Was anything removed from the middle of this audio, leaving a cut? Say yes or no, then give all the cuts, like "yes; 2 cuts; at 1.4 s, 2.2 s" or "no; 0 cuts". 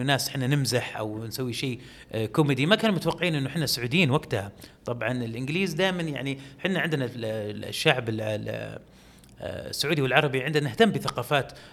no; 0 cuts